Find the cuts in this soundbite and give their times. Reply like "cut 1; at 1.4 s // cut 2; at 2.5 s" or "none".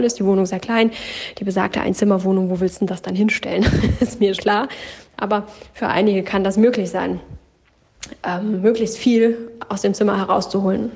cut 1; at 4.4 s